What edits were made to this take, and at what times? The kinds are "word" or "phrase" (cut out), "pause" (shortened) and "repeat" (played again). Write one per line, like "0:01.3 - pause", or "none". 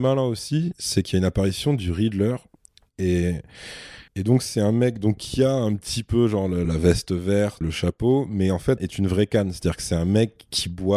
0:04.1 - pause
0:06.6 - word
0:07.6 - word
0:08.8 - phrase